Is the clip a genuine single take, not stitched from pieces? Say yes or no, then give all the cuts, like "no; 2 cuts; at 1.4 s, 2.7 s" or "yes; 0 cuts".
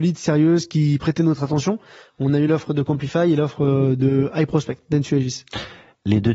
yes; 0 cuts